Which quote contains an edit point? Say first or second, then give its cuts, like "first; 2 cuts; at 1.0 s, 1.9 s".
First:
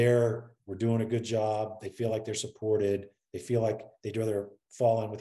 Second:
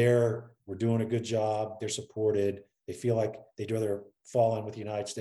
second; 1 cut; at 1.8 s